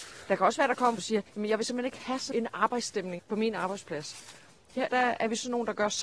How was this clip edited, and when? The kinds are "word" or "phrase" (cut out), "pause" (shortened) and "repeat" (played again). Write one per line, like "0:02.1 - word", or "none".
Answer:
0:01.0 - phrase
0:01.3 - pause
0:02.3 - word
0:03.2 - word
0:04.9 - word